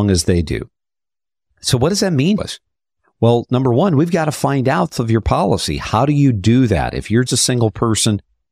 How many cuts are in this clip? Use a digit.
3